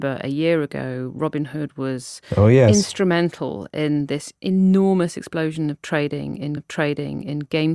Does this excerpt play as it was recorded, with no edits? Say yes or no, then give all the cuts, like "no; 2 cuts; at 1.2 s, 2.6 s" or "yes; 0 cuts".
no; 1 cut; at 6.6 s